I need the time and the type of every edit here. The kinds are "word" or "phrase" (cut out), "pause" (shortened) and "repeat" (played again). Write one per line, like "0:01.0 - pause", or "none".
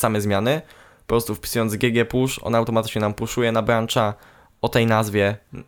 none